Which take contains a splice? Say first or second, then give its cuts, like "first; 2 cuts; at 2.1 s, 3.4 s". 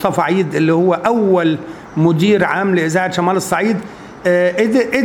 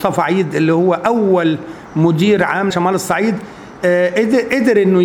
second; 1 cut; at 2.7 s